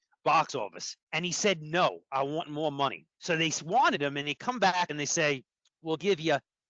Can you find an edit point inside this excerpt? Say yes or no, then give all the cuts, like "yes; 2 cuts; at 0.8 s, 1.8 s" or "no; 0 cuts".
yes; 3 cuts; at 1.0 s, 3.1 s, 5.6 s